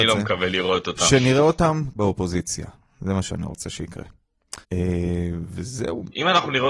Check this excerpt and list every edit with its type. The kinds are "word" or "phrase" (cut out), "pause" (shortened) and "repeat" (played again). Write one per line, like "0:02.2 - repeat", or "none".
0:02.0 - word
0:04.6 - pause